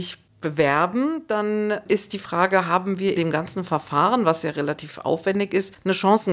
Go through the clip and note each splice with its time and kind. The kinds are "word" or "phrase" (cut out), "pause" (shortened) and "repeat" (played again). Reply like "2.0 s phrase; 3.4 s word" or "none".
3.1 s word